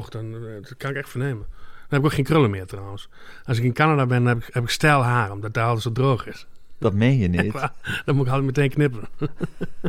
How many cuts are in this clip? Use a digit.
0